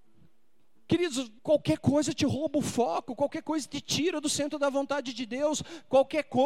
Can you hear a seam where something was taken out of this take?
yes; 1 cut; at 1.4 s

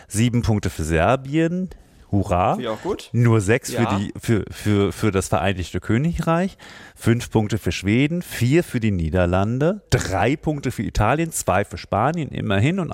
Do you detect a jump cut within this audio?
no; 0 cuts

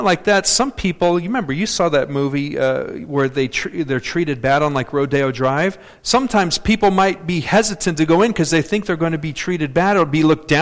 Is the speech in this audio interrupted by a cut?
no; 0 cuts

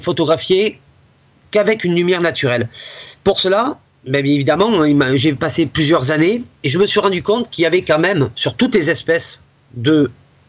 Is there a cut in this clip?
no; 0 cuts

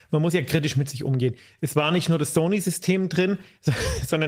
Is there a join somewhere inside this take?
no; 0 cuts

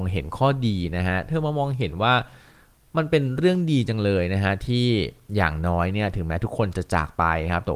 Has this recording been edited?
no; 0 cuts

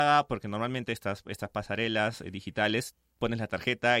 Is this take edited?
no; 0 cuts

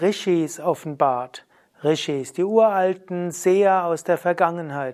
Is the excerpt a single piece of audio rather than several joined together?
yes; 0 cuts

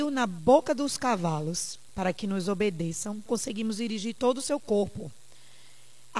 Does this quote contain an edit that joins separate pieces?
yes; 1 cut; at 3.3 s

